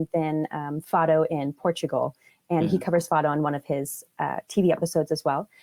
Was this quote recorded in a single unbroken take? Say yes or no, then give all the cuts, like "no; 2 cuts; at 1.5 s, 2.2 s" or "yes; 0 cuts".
yes; 0 cuts